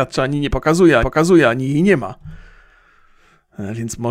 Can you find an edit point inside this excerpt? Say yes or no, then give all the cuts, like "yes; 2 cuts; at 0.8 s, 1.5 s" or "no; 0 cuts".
yes; 1 cut; at 1.0 s